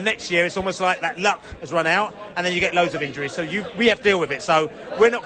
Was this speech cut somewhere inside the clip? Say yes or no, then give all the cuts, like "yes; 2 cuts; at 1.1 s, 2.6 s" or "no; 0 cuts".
yes; 1 cut; at 4.0 s